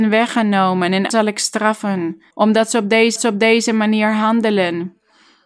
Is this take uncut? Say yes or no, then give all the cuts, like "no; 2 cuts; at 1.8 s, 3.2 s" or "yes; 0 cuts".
no; 3 cuts; at 1.1 s, 2.3 s, 3.2 s